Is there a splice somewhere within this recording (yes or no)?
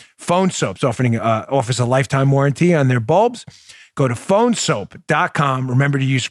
no